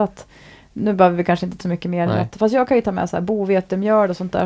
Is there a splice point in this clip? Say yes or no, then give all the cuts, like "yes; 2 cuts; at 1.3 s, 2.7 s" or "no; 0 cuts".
yes; 1 cut; at 1.6 s